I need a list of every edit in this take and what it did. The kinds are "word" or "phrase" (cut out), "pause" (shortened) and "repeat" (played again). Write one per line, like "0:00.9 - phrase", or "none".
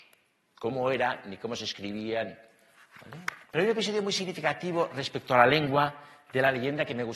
0:03.4 - pause